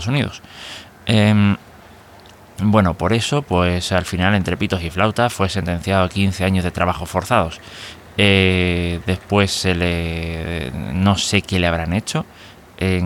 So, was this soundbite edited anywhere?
no; 0 cuts

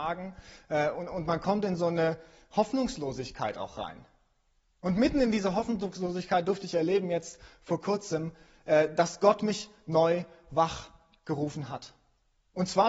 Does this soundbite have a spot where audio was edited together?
no; 0 cuts

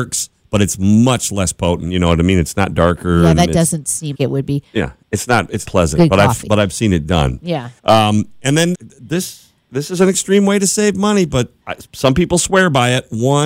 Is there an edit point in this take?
yes; 5 cuts; at 4.1 s, 5.7 s, 7.8 s, 8.7 s, 11.6 s

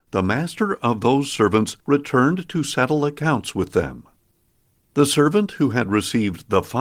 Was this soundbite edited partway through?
no; 0 cuts

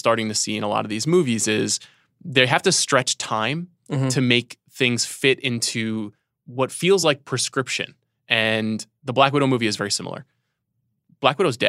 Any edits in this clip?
no; 0 cuts

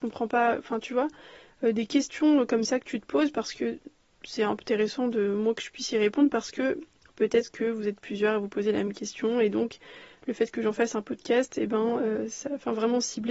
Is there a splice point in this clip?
no; 0 cuts

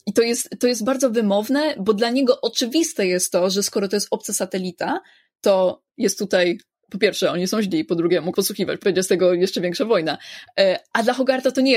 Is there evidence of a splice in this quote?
yes; 3 cuts; at 5.9 s, 8.3 s, 8.8 s

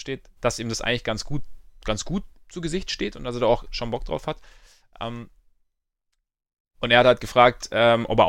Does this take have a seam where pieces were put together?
no; 0 cuts

